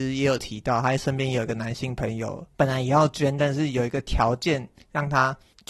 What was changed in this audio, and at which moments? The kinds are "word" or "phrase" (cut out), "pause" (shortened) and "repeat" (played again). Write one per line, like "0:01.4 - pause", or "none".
0:02.5 - pause